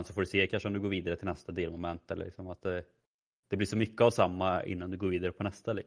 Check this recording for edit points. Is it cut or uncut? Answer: uncut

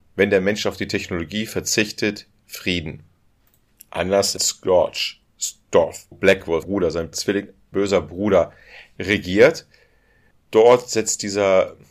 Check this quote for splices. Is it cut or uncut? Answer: cut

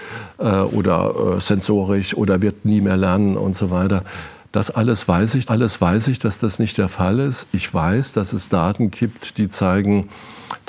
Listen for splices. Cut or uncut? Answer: cut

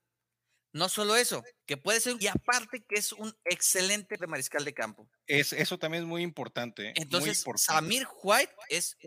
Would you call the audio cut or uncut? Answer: cut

